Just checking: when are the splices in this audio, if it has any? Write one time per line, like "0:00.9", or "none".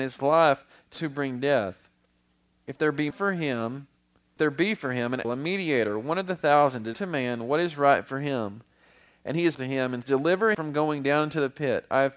0:00.9
0:03.1
0:04.4
0:05.2
0:06.9
0:09.5
0:10.0
0:10.5